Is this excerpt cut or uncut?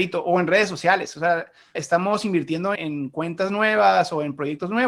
cut